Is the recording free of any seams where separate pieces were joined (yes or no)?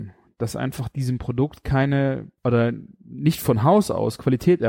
no